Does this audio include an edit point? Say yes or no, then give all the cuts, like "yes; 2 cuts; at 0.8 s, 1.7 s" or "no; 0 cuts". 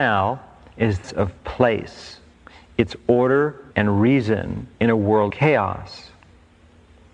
yes; 5 cuts; at 1.0 s, 2.3 s, 3.7 s, 4.7 s, 5.3 s